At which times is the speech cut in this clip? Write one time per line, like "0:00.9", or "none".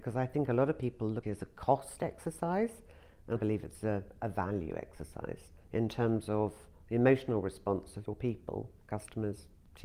0:01.2
0:03.4
0:05.6
0:08.1